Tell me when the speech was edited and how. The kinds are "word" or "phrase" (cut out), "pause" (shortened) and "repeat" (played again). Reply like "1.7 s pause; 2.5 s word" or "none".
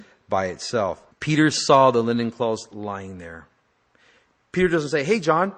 1.1 s pause